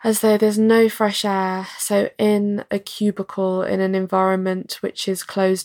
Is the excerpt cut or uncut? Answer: uncut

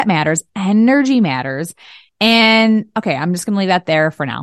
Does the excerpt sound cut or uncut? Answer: uncut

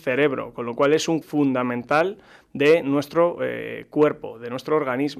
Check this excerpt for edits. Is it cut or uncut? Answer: cut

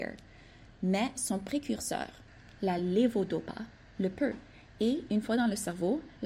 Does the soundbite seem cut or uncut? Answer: uncut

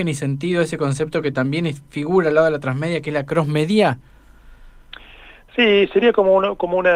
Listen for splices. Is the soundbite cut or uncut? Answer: uncut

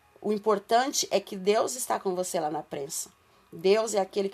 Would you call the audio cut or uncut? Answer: uncut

